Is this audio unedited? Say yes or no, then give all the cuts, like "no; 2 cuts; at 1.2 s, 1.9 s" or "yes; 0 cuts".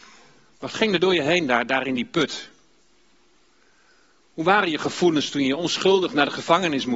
yes; 0 cuts